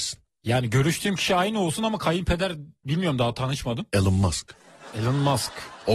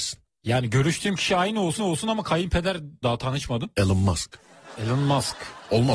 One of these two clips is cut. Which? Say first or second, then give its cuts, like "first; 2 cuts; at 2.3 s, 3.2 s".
second; 2 cuts; at 1.8 s, 3.0 s